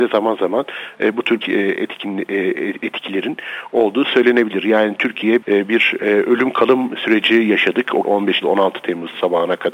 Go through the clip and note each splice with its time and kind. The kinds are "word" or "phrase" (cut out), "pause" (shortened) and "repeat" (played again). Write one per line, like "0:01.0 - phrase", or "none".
0:01.4 - word
0:05.4 - word
0:08.0 - word
0:08.4 - word

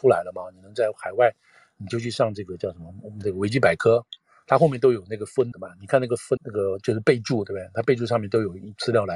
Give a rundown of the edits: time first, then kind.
0:05.5 - word
0:06.4 - word

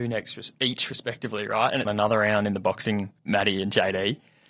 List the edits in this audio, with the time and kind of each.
0:01.8 - phrase
0:03.2 - word

